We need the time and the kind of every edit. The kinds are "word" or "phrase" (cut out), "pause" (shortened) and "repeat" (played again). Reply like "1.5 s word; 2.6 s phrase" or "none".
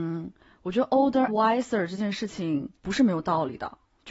1.3 s word; 2.8 s pause